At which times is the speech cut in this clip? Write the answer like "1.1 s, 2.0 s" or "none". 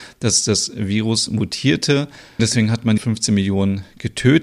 2.4 s, 3.0 s

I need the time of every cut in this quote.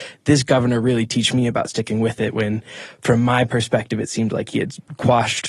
none

